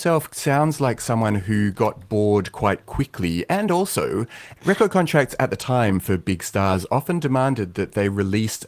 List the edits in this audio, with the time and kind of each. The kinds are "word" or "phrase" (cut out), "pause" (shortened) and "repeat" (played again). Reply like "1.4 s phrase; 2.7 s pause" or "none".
none